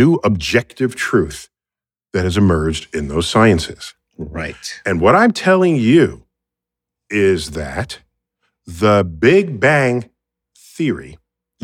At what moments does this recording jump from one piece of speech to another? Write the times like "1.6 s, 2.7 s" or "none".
none